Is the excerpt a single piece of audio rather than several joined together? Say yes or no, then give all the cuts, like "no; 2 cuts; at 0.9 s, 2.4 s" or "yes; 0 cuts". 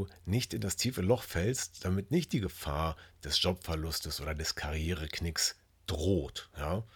yes; 0 cuts